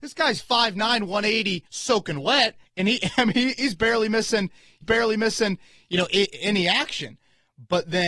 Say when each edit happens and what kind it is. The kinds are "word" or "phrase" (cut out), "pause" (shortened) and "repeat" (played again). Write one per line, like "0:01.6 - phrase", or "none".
0:01.7 - pause
0:02.7 - pause
0:04.8 - repeat